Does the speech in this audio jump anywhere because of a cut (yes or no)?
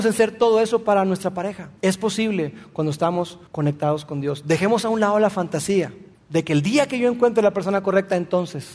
yes